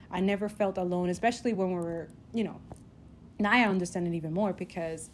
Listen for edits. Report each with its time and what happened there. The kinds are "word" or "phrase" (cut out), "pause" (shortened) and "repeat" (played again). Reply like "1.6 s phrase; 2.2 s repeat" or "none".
none